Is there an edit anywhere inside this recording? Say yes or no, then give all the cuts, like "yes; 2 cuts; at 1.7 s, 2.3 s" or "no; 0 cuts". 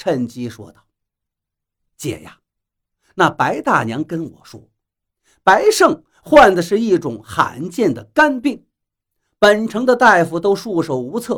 no; 0 cuts